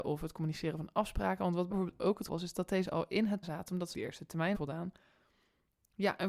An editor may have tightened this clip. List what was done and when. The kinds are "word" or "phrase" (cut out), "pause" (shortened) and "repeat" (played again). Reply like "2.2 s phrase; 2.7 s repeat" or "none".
1.7 s word; 2.3 s word; 2.8 s word; 3.4 s word; 3.9 s word; 4.5 s word